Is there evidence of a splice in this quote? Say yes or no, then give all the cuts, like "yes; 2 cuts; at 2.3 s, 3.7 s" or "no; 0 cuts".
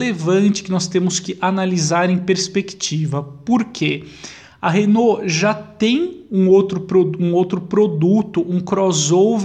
no; 0 cuts